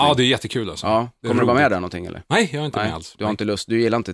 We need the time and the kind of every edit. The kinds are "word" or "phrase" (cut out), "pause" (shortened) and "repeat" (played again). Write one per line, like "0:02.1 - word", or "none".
none